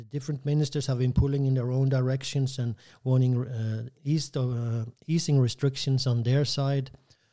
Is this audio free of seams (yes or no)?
no